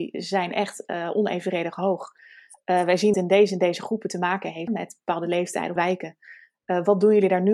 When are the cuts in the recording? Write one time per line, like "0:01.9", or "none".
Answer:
0:03.1
0:04.7
0:05.8